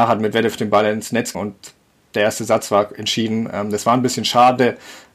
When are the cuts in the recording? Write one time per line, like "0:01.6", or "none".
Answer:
0:01.3